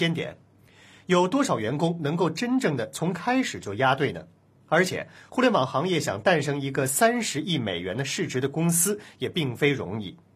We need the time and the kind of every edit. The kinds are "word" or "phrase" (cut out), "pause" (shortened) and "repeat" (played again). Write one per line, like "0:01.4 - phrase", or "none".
none